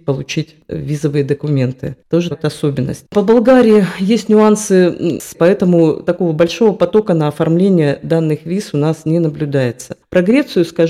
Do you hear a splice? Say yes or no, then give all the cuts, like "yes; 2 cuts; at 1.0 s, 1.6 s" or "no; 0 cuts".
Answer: yes; 2 cuts; at 2.3 s, 5.3 s